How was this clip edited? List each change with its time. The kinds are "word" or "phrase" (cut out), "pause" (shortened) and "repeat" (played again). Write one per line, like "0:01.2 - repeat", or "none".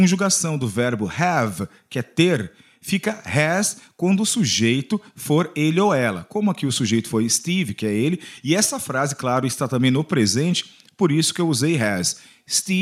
none